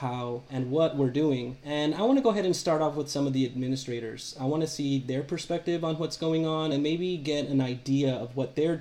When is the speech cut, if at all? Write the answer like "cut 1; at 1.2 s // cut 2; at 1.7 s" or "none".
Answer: none